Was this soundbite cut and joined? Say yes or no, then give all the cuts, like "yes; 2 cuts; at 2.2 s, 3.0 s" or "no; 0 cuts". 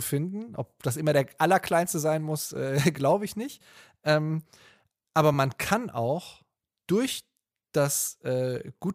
no; 0 cuts